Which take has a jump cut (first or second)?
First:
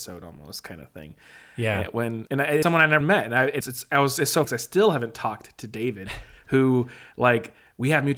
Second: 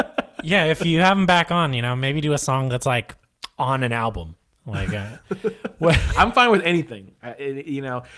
first